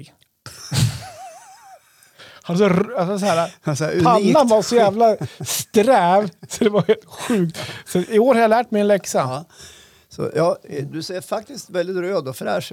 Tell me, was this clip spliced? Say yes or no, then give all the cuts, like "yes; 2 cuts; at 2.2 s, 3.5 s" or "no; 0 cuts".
no; 0 cuts